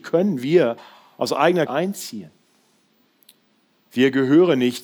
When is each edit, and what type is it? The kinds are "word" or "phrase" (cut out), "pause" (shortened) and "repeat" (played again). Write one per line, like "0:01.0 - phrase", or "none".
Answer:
0:01.7 - phrase

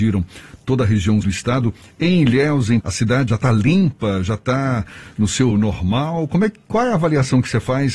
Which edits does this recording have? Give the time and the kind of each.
0:01.2 - word
0:02.8 - word
0:03.3 - word
0:05.5 - word

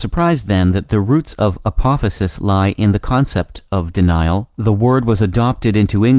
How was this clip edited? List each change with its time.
0:04.5 - pause

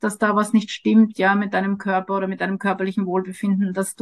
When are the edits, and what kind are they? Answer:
none

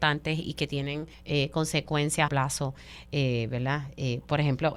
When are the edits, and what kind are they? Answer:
0:01.1 - pause
0:02.3 - phrase

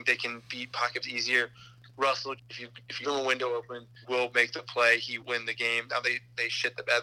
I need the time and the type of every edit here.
0:01.0 - word
0:02.4 - word
0:03.0 - word
0:04.0 - word
0:05.2 - word

